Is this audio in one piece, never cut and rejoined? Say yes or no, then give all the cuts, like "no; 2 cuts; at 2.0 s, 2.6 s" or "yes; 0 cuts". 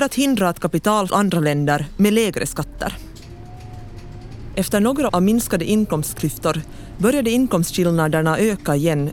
no; 2 cuts; at 1.1 s, 5.1 s